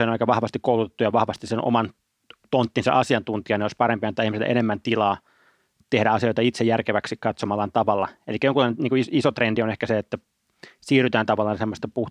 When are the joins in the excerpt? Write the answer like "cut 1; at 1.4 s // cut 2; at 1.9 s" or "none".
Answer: none